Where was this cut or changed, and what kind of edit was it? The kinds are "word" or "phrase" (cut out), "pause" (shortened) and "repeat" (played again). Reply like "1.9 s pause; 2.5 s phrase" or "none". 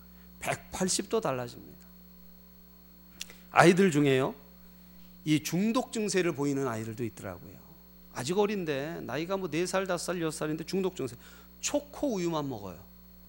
none